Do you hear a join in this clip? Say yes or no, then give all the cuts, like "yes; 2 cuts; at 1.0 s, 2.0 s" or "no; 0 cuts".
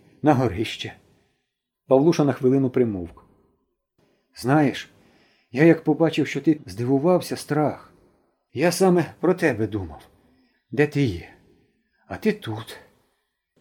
yes; 1 cut; at 6.6 s